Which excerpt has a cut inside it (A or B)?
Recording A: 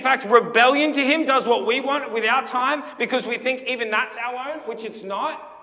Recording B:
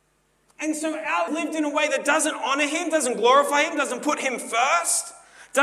B